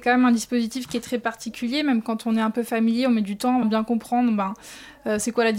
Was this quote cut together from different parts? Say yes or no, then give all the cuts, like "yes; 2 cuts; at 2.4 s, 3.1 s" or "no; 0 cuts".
yes; 1 cut; at 3.6 s